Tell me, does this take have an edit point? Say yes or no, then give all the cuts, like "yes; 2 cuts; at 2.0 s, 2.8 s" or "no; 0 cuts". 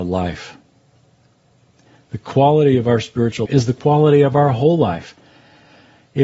yes; 1 cut; at 3.5 s